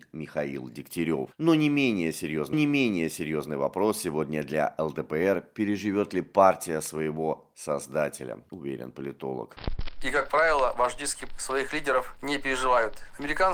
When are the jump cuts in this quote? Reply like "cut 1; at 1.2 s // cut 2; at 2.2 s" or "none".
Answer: cut 1; at 2.5 s // cut 2; at 11.3 s

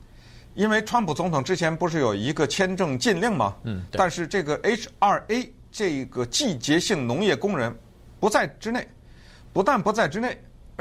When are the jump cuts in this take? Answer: cut 1; at 5.7 s

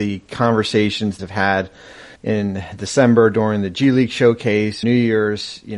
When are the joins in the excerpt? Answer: cut 1; at 1.2 s // cut 2; at 2.2 s // cut 3; at 4.8 s

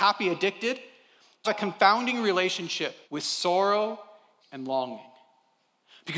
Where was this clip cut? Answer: cut 1; at 1.4 s // cut 2; at 3.0 s // cut 3; at 4.4 s

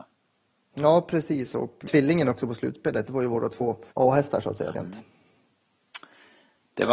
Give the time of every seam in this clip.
cut 1; at 1.9 s // cut 2; at 3.9 s // cut 3; at 4.7 s

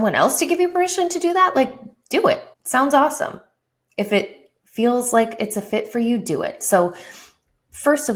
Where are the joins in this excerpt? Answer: cut 1; at 2.5 s

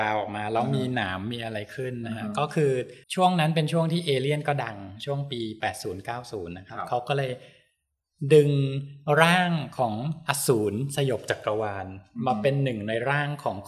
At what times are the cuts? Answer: cut 1; at 3.0 s

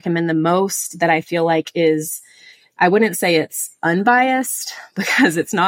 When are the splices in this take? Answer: none

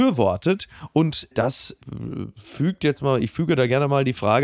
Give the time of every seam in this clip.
none

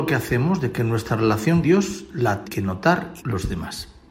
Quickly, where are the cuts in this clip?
cut 1; at 1.6 s // cut 2; at 2.4 s // cut 3; at 3.2 s

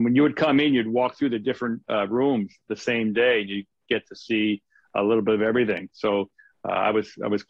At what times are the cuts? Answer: none

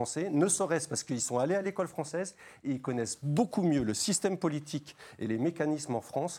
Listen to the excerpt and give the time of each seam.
none

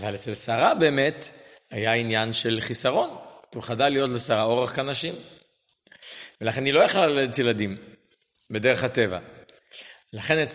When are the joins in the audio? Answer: none

